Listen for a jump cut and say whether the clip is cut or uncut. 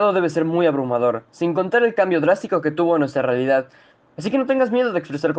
uncut